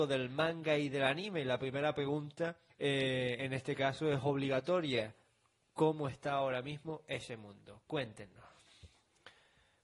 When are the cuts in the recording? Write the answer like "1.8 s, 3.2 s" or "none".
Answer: 2.7 s